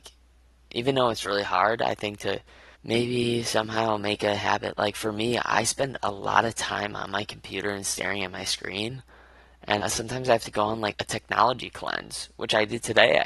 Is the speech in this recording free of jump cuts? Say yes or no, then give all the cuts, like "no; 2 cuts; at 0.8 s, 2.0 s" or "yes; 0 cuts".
no; 3 cuts; at 2.7 s, 9.8 s, 10.9 s